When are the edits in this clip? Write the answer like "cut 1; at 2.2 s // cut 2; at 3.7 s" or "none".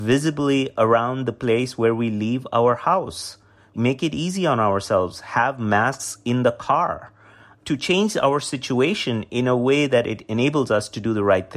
none